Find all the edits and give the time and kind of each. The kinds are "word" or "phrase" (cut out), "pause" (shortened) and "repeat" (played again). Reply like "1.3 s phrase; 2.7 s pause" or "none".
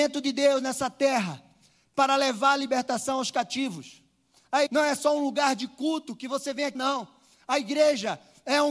4.7 s word; 6.7 s word